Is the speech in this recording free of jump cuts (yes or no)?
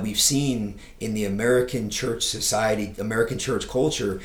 yes